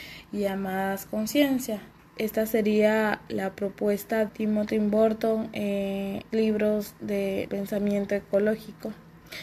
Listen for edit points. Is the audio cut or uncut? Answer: cut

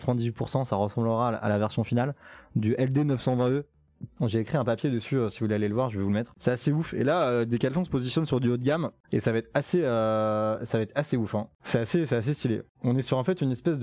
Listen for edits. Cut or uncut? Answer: uncut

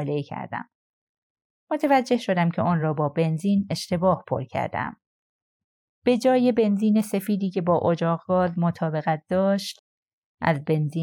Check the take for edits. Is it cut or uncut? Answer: uncut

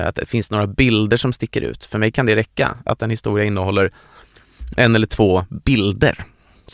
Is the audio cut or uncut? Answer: uncut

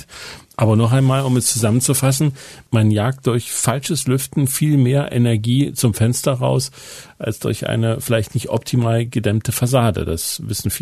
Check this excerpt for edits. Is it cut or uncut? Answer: uncut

